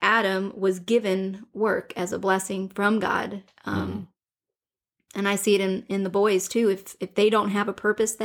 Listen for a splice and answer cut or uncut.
uncut